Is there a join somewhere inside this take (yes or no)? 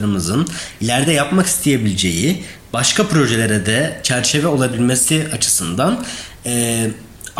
no